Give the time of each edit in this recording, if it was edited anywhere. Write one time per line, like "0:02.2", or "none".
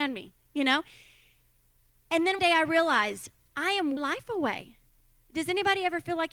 0:02.4
0:04.0

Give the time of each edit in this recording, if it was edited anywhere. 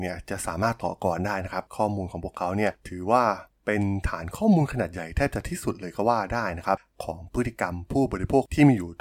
0:03.5

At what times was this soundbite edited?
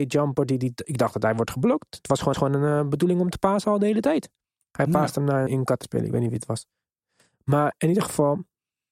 0:02.3
0:05.5
0:05.8

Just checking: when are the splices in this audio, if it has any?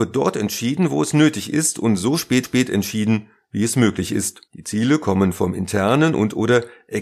0:02.4
0:04.5

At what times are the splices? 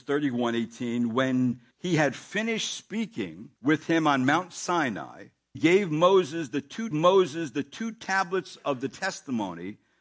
0:01.7
0:03.6
0:05.5
0:06.9

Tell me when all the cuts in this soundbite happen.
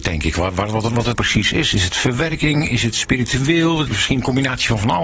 0:01.1
0:03.9

